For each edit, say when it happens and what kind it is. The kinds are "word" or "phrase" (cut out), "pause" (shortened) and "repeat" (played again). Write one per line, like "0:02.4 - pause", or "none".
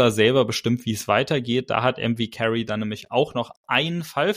none